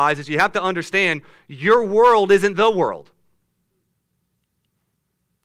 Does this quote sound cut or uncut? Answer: uncut